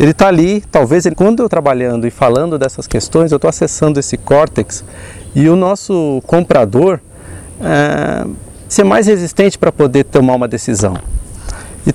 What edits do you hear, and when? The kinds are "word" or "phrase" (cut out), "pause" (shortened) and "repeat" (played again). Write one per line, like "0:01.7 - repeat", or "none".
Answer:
0:01.1 - phrase
0:01.5 - word
0:08.7 - word

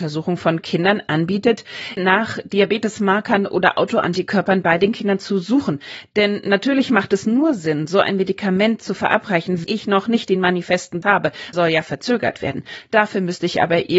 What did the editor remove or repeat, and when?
0:02.0 - word
0:09.6 - word
0:11.0 - word
0:11.5 - phrase

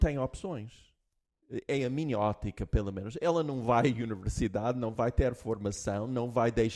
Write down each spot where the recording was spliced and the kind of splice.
none

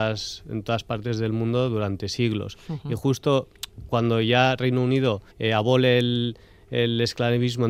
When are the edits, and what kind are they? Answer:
0:05.3 - pause

